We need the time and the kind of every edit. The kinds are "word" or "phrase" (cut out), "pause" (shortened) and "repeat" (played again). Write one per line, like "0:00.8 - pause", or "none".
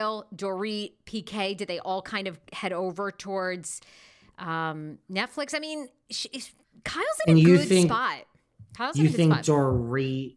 none